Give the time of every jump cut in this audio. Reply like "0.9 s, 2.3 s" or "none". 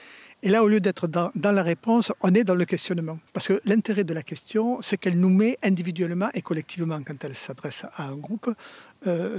3.3 s